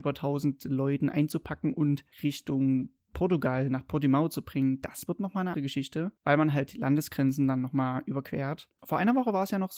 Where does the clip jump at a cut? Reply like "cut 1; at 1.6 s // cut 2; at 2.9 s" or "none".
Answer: cut 1; at 2.1 s // cut 2; at 5.5 s // cut 3; at 6.2 s // cut 4; at 8.7 s